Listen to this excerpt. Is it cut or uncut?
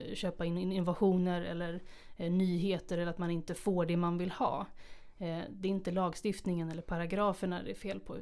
uncut